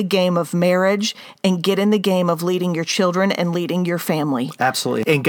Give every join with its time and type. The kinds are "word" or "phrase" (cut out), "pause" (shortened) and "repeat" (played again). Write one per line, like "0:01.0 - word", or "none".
none